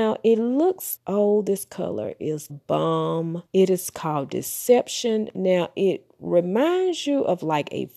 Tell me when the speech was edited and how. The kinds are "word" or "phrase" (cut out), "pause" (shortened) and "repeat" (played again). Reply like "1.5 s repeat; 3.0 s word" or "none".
1.0 s word; 2.5 s word; 3.5 s pause